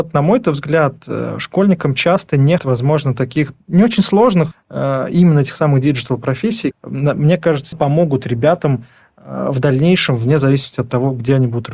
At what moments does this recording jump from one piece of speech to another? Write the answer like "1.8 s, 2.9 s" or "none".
2.6 s, 4.5 s, 6.7 s, 7.7 s